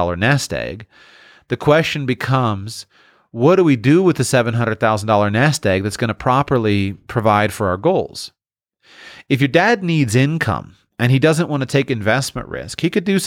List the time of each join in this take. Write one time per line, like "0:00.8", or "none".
none